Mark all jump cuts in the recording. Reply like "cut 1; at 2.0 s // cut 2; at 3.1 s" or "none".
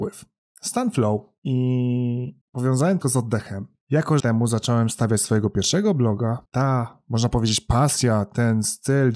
cut 1; at 2.4 s // cut 2; at 3.0 s // cut 3; at 4.2 s // cut 4; at 6.4 s